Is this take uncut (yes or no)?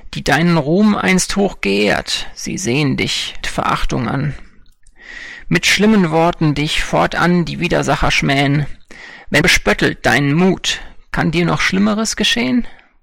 no